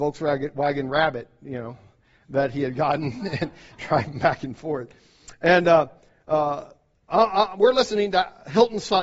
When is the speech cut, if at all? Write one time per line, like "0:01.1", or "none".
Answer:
none